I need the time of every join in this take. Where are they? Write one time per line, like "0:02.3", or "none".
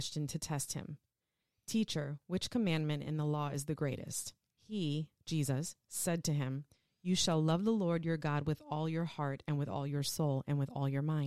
none